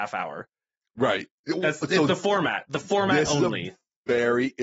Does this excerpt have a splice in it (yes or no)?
no